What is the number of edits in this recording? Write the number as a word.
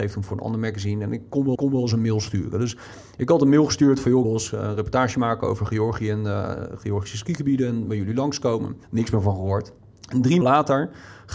five